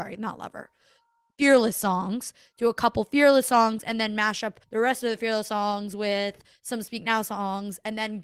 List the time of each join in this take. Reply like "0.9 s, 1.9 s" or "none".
4.6 s

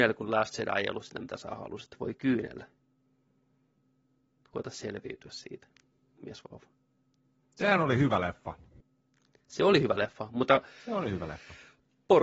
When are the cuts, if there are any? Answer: none

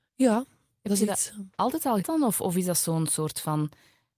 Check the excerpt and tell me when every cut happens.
2.0 s

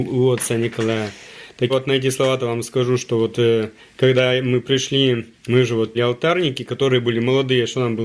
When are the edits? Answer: 1.7 s, 3.8 s, 5.3 s, 5.9 s

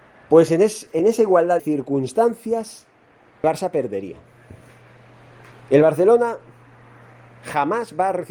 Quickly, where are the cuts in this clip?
1.0 s, 1.6 s, 3.4 s

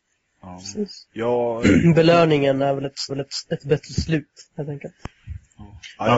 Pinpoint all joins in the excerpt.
1.0 s, 3.1 s, 4.5 s

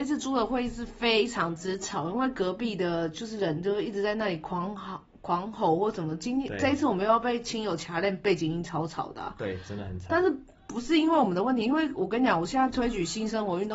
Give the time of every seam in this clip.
none

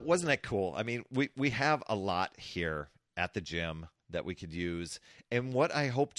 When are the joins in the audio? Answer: none

